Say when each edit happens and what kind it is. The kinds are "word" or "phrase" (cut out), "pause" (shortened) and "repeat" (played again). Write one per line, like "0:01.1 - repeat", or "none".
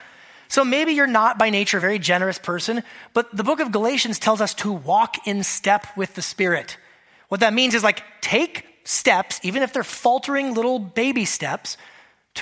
none